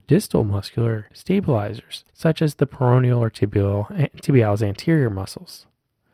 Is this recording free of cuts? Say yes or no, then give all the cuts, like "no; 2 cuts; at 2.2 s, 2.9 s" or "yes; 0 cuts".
no; 1 cut; at 2.1 s